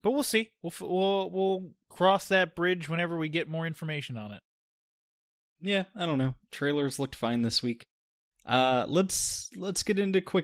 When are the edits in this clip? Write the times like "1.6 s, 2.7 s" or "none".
none